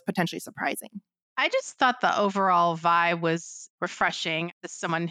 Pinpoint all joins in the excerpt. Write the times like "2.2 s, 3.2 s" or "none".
none